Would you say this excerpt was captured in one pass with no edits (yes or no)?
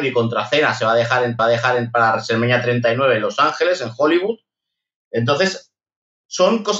no